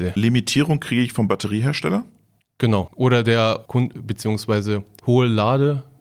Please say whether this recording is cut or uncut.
uncut